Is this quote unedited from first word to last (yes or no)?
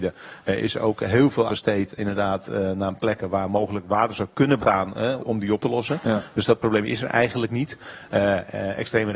no